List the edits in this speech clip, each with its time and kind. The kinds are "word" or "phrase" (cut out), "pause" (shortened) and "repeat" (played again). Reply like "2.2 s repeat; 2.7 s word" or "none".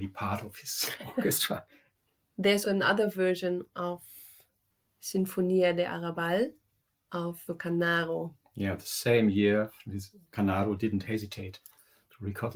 2.6 s word; 7.5 s word